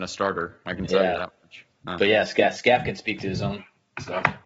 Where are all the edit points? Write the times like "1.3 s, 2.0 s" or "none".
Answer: none